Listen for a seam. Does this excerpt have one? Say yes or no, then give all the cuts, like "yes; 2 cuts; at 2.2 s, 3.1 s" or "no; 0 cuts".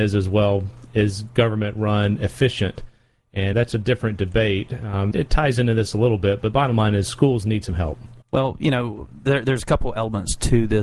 yes; 3 cuts; at 3.5 s, 5.1 s, 8.2 s